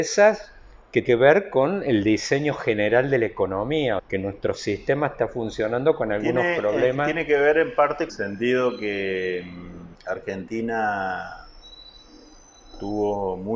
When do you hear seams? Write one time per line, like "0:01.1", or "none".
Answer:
0:01.0
0:04.0
0:08.1
0:09.9